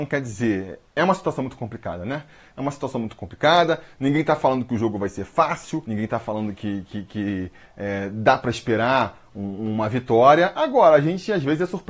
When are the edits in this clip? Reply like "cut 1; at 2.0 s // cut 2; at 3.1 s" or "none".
none